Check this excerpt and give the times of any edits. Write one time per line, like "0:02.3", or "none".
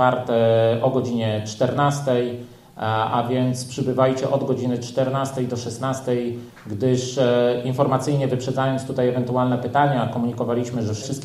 none